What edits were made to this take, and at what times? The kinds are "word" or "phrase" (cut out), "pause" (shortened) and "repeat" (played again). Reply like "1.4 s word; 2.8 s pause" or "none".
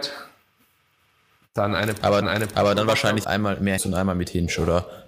2.2 s repeat; 3.2 s word; 3.8 s phrase